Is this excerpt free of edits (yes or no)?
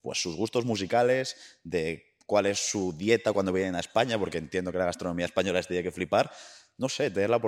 yes